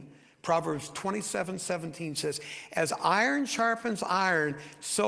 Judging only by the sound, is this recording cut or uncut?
uncut